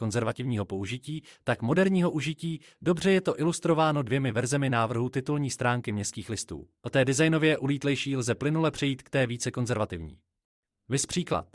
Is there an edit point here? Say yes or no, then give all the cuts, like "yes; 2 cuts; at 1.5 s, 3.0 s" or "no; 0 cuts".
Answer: yes; 1 cut; at 6.8 s